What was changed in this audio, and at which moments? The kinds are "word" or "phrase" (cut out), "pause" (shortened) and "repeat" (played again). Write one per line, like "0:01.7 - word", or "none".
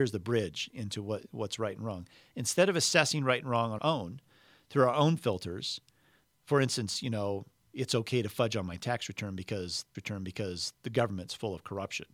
0:03.8 - word
0:09.9 - repeat